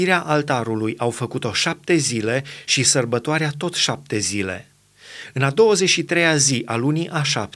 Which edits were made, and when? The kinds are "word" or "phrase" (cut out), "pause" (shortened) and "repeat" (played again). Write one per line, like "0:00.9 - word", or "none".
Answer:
none